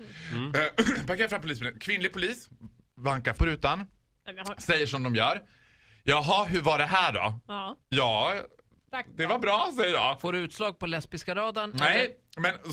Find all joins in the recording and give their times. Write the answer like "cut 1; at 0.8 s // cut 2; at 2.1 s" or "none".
cut 1; at 3.4 s // cut 2; at 7.8 s